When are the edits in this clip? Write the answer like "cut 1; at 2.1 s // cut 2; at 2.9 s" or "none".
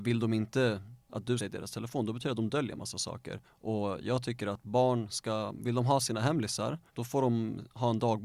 cut 1; at 1.4 s // cut 2; at 3.4 s // cut 3; at 6.9 s